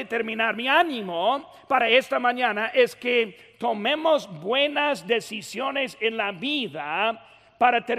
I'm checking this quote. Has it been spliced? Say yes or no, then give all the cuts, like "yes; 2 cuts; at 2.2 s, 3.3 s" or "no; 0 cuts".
no; 0 cuts